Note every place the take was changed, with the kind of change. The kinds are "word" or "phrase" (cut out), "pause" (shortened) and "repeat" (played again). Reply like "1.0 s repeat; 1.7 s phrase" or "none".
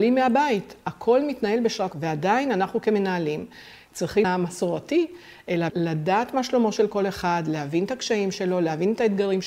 1.9 s word; 4.2 s phrase; 5.7 s word